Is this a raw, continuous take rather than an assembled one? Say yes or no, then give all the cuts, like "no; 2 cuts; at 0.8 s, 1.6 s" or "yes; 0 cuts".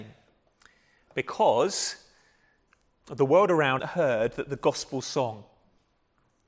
no; 1 cut; at 3.8 s